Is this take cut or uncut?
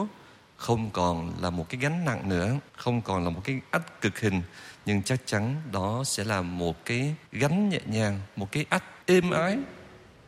cut